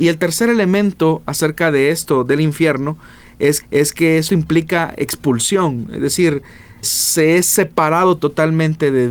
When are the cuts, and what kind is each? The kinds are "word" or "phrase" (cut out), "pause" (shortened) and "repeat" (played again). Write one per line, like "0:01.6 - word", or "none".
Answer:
0:03.6 - repeat
0:04.3 - phrase
0:06.8 - word